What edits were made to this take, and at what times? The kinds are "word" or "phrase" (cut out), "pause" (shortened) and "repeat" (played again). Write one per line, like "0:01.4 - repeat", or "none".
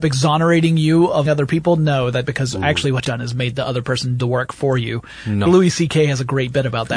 0:01.3 - word
0:02.3 - word
0:03.0 - word
0:04.2 - word
0:05.5 - word